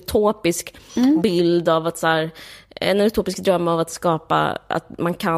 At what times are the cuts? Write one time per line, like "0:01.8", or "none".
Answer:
none

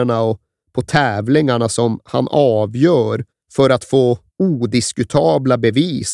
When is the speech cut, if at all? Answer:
0:03.3
0:04.3

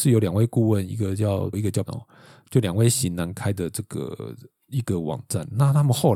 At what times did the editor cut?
0:01.5
0:01.9

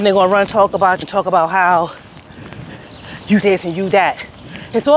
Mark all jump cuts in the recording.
0:01.0
0:03.4
0:03.9

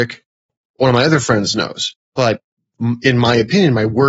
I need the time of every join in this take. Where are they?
0:02.0

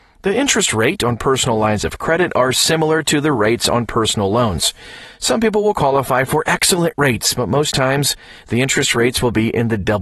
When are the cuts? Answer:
none

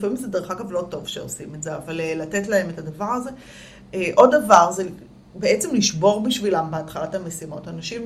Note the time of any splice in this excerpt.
none

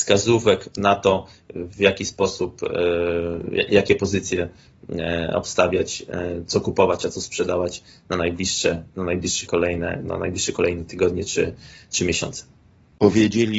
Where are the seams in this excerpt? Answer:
0:09.5

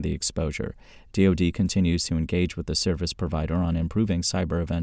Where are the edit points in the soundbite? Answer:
none

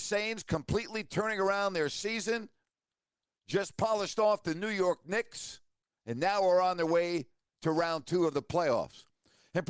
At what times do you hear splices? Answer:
none

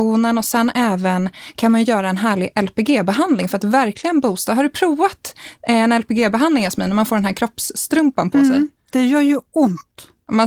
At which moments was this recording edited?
none

